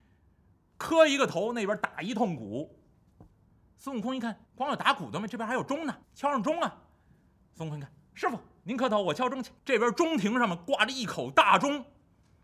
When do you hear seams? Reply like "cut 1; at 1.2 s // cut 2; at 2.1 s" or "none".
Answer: cut 1; at 4.5 s // cut 2; at 6.0 s // cut 3; at 9.6 s